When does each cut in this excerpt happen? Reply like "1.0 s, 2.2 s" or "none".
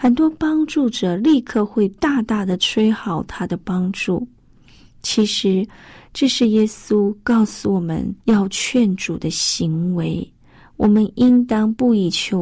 8.2 s